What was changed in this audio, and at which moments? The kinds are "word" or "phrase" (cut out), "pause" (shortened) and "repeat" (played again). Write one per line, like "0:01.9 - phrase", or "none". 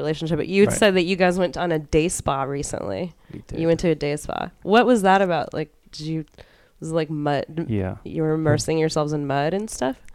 none